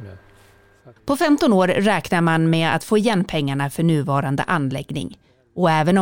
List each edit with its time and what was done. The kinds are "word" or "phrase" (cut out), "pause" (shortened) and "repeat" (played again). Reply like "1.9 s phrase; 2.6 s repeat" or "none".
1.0 s pause